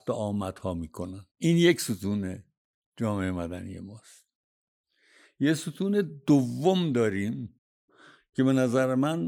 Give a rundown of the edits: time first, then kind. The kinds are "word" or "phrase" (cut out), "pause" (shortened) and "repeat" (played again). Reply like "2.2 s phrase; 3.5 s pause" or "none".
1.3 s pause